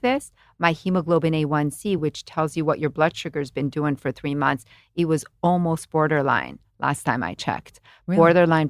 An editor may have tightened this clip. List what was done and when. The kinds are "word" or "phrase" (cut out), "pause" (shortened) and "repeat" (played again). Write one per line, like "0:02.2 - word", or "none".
none

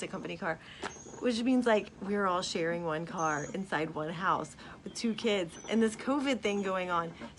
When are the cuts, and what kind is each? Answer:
none

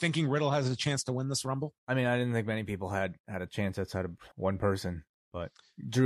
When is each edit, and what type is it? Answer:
0:01.8 - pause
0:04.3 - pause

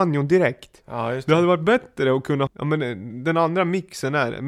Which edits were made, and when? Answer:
0:02.5 - word

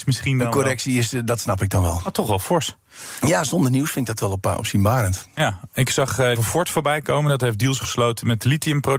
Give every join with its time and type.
0:06.4 - phrase

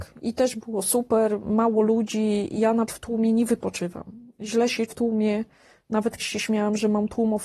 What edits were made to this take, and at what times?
0:02.9 - word
0:04.9 - word
0:06.2 - word

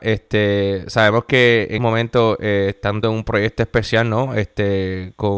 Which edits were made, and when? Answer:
0:01.8 - word
0:03.0 - word

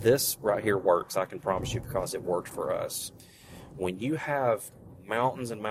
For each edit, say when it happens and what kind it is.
none

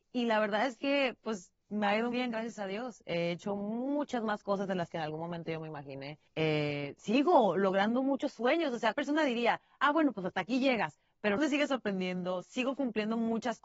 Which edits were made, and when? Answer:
0:02.1 - word
0:06.3 - pause
0:08.9 - word
0:11.4 - phrase

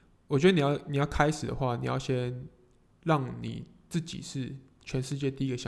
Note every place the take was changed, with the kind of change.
none

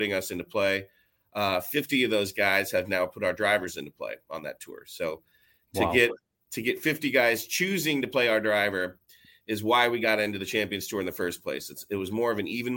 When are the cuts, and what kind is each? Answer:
none

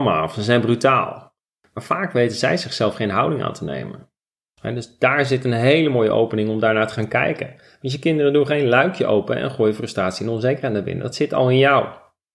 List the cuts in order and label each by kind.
none

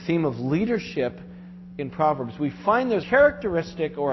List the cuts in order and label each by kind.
0:03.0 - word

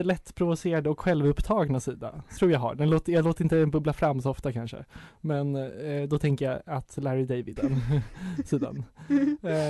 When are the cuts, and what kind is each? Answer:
0:02.4 - word
0:07.6 - phrase

